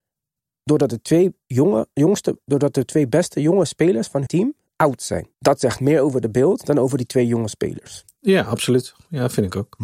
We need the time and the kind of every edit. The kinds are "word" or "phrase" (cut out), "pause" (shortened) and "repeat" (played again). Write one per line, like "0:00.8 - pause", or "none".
0:04.3 - word
0:05.3 - pause